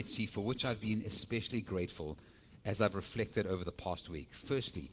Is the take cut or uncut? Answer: uncut